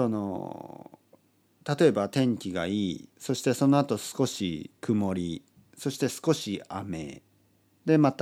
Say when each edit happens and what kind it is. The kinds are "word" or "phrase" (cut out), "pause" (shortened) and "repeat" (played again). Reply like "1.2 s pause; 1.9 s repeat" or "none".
3.1 s pause; 4.8 s pause